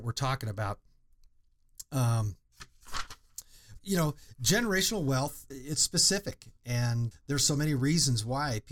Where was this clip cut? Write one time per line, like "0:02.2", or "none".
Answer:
0:03.8
0:05.5
0:07.1